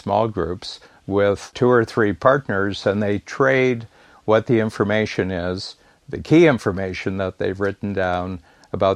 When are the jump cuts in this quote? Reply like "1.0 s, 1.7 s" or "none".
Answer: none